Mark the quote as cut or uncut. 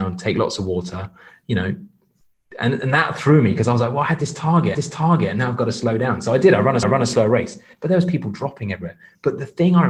cut